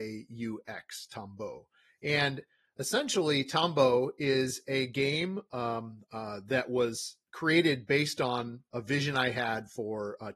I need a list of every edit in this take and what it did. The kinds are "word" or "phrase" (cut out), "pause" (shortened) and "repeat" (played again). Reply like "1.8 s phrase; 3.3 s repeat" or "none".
none